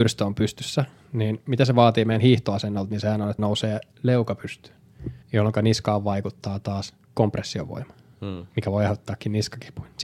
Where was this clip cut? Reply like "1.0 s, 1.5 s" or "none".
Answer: 3.4 s, 5.2 s, 7.0 s, 8.5 s